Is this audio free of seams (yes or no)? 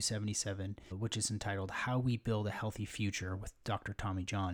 no